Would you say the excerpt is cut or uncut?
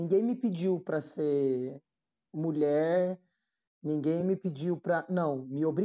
uncut